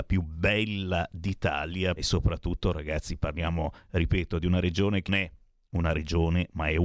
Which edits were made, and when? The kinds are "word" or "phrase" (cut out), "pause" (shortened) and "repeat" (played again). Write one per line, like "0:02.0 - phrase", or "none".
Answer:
0:02.0 - phrase
0:05.1 - word